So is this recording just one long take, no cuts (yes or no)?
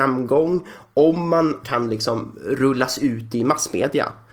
no